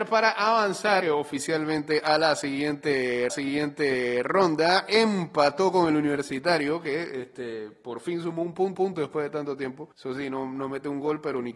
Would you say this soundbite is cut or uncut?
cut